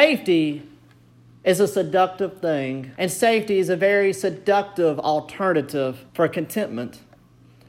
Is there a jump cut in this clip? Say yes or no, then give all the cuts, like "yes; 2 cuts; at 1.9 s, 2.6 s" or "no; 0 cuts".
yes; 2 cuts; at 2.9 s, 6.1 s